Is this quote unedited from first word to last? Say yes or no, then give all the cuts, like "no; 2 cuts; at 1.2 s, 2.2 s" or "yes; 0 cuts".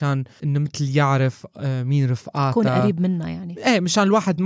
yes; 0 cuts